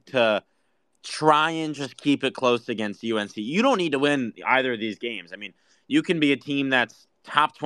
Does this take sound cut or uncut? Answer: uncut